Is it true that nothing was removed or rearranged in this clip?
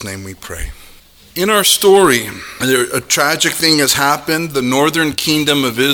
yes; 0 cuts

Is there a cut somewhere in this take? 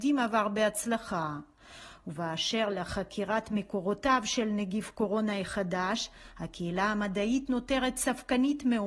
no; 0 cuts

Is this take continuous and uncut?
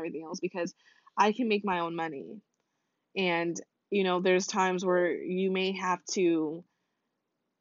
yes; 0 cuts

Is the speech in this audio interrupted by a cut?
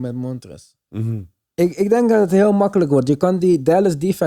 no; 0 cuts

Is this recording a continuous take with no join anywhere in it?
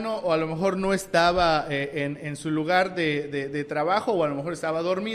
yes; 0 cuts

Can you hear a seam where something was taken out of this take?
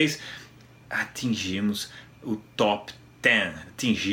no; 0 cuts

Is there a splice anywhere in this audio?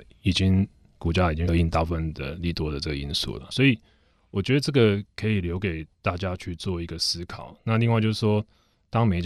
yes; 2 cuts; at 1.5 s, 3.5 s

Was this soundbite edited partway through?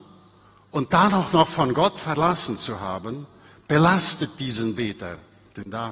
no; 0 cuts

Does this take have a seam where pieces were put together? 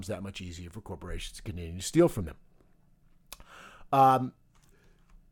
no; 0 cuts

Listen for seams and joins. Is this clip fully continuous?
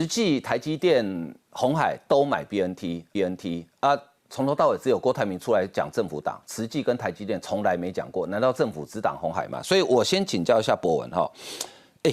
no; 1 cut; at 3.1 s

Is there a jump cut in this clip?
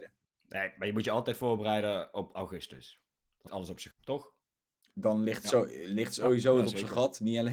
yes; 2 cuts; at 3.5 s, 3.9 s

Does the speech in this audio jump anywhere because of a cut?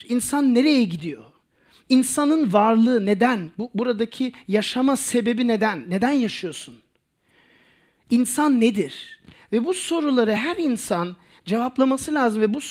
no; 0 cuts

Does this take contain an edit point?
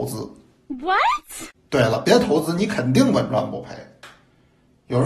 no; 0 cuts

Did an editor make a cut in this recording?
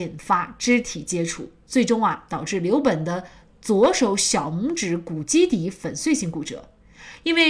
no; 0 cuts

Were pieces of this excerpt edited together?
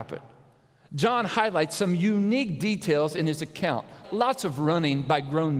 yes; 1 cut; at 4.0 s

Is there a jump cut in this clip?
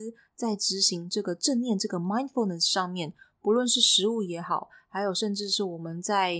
no; 0 cuts

